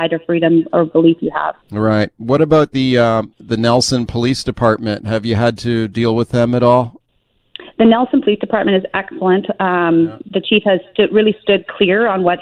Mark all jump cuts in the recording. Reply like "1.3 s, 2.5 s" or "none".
1.6 s, 3.3 s